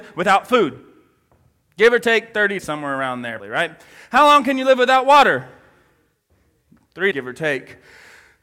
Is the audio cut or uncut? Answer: cut